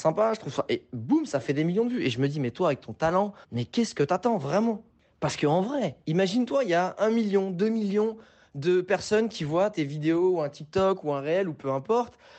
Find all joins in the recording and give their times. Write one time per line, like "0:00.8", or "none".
0:03.4